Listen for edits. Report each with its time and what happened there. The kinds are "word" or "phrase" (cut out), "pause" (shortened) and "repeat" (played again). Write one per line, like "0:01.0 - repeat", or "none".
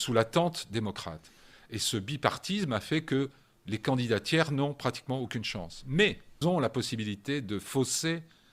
0:06.4 - word

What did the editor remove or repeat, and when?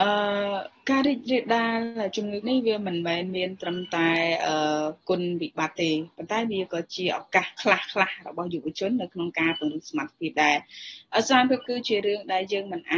0:02.4 - word
0:11.6 - word

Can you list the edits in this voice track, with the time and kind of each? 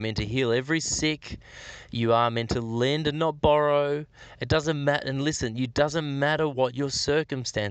none

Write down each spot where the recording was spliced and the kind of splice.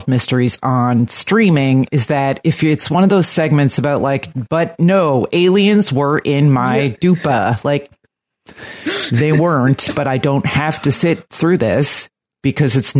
none

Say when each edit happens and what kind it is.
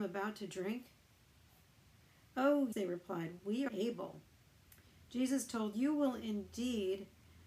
0:02.7 - word
0:03.7 - word
0:05.7 - word

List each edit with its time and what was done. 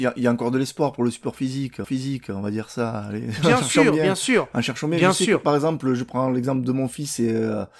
0:01.8 - repeat

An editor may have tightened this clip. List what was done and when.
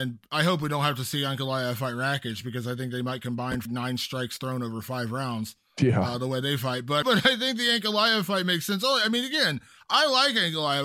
0:03.7 - word
0:07.0 - word

